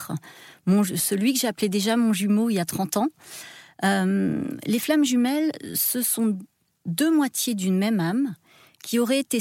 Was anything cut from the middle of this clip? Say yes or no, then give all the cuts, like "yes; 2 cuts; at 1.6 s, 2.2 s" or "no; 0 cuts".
no; 0 cuts